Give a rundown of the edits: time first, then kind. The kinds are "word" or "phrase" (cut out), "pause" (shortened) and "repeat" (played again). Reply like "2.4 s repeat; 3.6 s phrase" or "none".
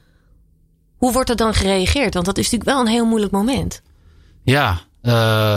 none